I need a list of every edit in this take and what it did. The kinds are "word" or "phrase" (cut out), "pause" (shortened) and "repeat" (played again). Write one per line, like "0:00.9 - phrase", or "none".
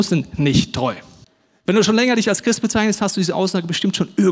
0:01.2 - pause